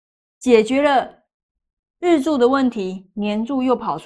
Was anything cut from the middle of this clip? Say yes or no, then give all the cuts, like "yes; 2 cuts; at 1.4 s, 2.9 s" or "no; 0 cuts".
no; 0 cuts